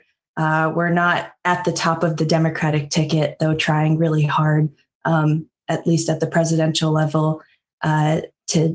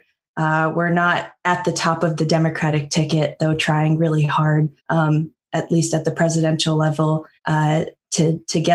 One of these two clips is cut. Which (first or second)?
second